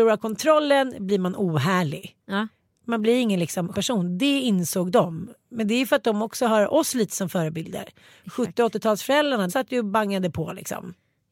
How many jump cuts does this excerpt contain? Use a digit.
2